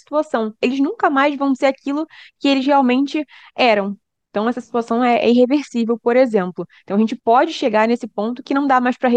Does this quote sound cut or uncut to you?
uncut